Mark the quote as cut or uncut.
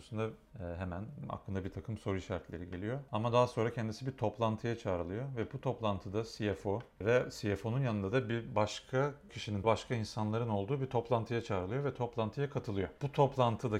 cut